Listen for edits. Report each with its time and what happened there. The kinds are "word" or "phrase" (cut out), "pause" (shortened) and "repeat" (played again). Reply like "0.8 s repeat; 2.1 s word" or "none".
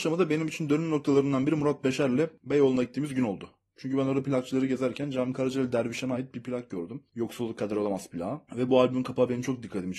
none